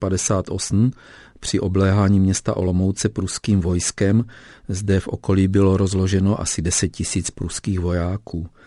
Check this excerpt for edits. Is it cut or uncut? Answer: uncut